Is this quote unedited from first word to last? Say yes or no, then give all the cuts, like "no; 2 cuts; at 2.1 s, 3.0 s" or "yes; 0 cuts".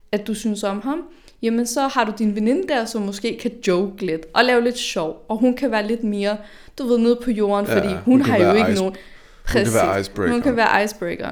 yes; 0 cuts